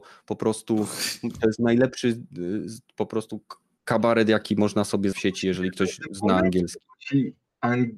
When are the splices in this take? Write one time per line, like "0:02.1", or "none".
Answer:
0:05.1